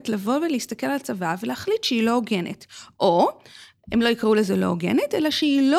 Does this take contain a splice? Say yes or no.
no